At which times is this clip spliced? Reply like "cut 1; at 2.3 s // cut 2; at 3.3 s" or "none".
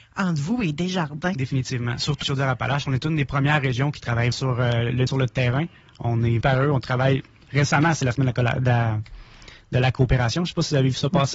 cut 1; at 2.2 s // cut 2; at 4.3 s // cut 3; at 5.1 s // cut 4; at 6.4 s